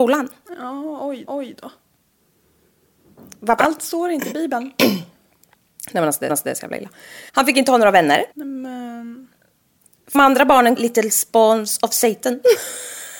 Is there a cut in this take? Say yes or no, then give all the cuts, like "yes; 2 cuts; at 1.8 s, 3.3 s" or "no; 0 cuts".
yes; 6 cuts; at 1.3 s, 6.3 s, 7.3 s, 8.3 s, 10.1 s, 10.8 s